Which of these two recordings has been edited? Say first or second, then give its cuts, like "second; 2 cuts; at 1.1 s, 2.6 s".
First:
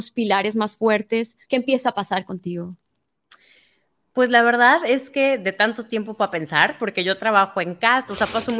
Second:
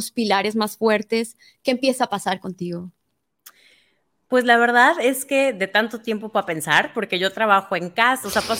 first; 1 cut; at 1.4 s